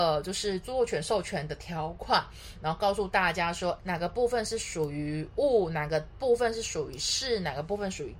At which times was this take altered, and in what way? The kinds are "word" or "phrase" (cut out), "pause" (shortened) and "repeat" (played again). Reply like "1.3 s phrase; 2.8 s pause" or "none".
3.8 s word